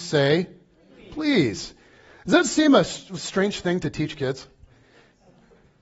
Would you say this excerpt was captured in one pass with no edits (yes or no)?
yes